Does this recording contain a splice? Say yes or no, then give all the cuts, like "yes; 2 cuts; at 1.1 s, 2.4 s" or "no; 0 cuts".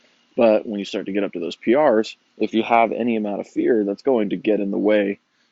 yes; 1 cut; at 2.3 s